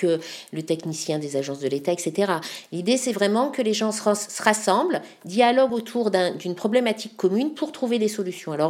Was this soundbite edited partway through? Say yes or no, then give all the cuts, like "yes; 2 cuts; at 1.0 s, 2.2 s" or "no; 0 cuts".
no; 0 cuts